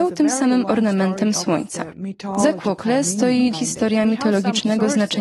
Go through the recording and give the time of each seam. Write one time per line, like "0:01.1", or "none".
0:03.5